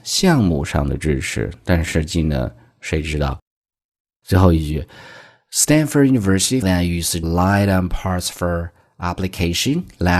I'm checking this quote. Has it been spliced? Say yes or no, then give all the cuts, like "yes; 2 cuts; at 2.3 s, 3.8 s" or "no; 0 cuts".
yes; 2 cuts; at 6.6 s, 7.2 s